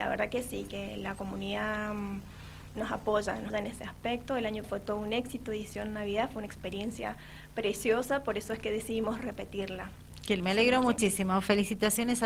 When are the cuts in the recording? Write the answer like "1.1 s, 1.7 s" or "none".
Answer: 3.5 s, 4.6 s, 10.4 s